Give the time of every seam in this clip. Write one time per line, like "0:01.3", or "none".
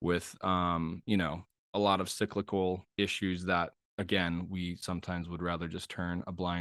0:01.5